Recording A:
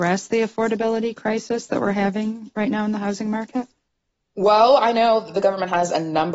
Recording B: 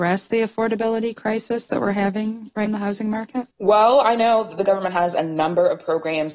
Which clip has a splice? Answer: B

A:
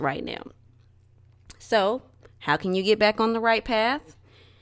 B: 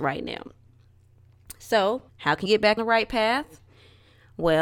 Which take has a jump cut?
B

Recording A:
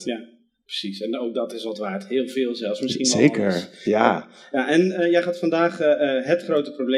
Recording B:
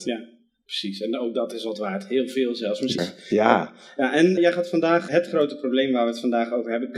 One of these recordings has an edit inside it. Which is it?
B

